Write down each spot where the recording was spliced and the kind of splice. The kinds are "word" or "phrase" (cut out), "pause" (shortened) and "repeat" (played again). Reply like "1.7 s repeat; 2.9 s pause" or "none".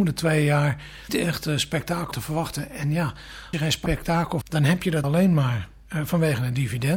1.1 s word; 2.1 s word; 3.5 s word; 4.4 s word; 5.0 s word